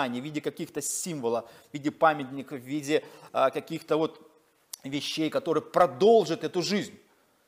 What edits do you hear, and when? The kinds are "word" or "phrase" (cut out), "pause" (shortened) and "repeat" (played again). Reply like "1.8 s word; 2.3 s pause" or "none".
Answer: none